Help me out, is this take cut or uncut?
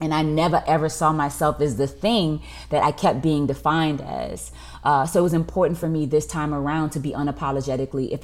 uncut